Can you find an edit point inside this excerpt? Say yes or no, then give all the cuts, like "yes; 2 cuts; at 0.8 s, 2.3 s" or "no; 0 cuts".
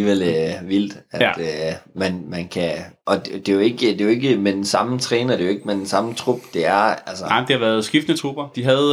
no; 0 cuts